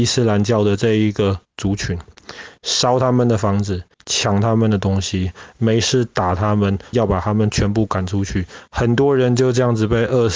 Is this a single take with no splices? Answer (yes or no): no